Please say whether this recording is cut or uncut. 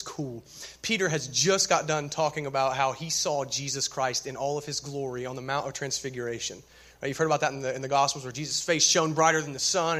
uncut